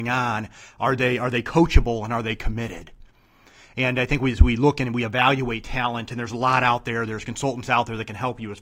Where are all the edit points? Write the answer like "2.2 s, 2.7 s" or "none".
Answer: none

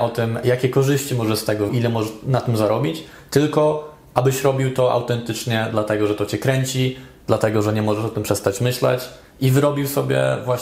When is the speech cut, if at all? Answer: 1.7 s

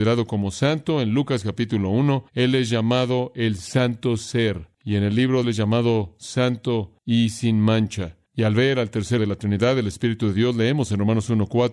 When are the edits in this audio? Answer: 2.3 s, 4.7 s, 5.4 s, 7.0 s, 8.2 s, 9.2 s

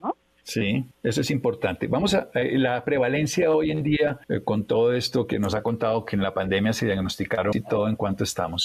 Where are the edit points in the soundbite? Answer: 0.9 s, 4.2 s, 7.5 s

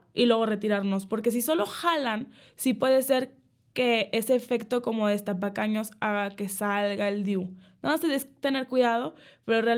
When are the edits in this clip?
none

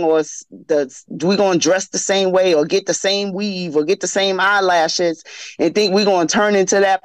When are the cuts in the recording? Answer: none

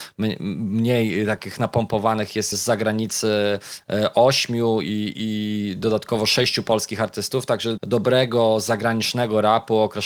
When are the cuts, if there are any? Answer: 2.5 s, 7.8 s

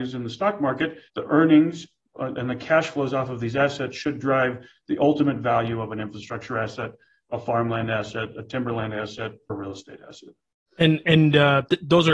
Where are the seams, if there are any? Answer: 1.1 s, 9.5 s

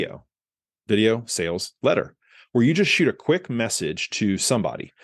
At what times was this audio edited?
none

